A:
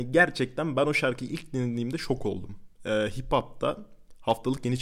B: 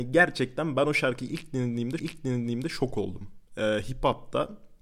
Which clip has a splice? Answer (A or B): B